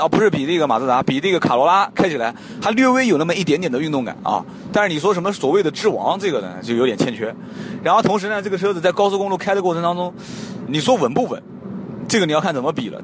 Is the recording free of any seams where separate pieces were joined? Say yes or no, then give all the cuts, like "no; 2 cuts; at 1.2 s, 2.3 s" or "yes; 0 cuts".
no; 1 cut; at 10.7 s